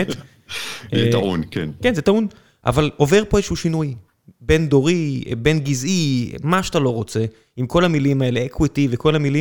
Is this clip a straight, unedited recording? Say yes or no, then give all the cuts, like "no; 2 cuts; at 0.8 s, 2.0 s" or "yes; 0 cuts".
yes; 0 cuts